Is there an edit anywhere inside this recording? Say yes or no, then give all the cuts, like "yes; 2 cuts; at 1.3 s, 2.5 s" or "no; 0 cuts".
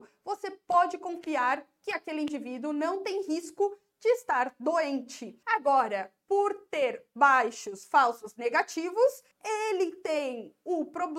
yes; 2 cuts; at 5.4 s, 9.3 s